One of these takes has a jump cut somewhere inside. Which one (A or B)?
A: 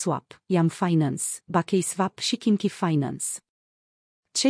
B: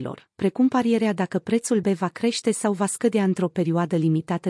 B